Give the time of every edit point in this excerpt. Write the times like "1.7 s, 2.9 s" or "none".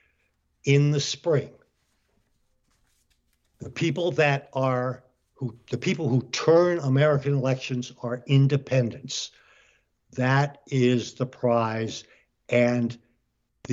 none